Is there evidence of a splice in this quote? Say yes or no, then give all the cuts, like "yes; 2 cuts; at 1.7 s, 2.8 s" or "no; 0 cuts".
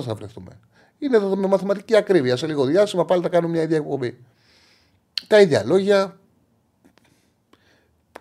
no; 0 cuts